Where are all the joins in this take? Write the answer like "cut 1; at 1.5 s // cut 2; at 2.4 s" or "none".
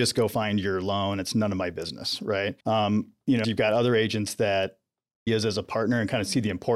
cut 1; at 2.6 s // cut 2; at 3.4 s // cut 3; at 5.3 s